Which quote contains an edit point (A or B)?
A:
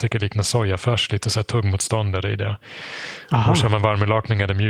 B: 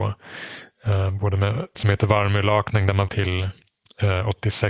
B